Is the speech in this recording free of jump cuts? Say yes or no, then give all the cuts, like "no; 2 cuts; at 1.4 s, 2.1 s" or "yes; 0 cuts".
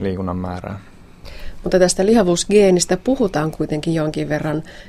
yes; 0 cuts